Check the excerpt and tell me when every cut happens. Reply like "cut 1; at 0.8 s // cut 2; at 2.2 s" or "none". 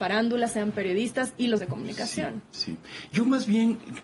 cut 1; at 1.6 s